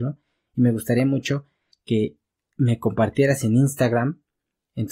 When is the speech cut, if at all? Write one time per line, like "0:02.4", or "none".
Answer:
none